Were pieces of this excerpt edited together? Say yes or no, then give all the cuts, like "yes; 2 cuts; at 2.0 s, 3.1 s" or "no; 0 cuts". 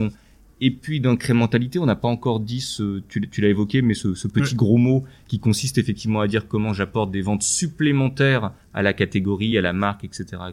no; 0 cuts